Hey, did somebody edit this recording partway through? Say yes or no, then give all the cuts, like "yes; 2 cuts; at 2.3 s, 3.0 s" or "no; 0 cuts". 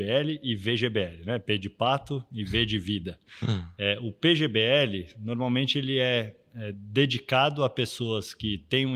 no; 0 cuts